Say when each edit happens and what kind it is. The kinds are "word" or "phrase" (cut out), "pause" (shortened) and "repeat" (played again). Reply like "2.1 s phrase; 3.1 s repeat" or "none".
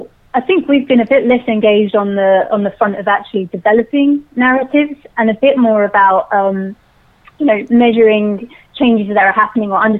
none